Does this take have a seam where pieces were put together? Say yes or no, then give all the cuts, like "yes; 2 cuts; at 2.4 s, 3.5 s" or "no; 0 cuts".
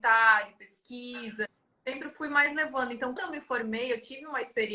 yes; 1 cut; at 3.2 s